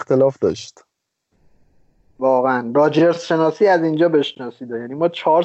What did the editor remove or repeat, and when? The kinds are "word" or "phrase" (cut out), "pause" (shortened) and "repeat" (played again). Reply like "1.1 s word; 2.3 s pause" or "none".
none